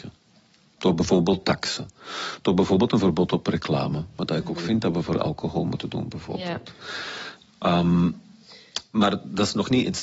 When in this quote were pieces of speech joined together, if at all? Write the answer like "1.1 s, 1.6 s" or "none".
none